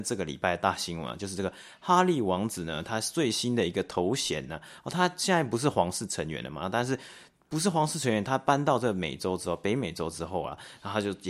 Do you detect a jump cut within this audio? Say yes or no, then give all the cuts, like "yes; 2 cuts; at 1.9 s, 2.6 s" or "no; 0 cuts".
no; 0 cuts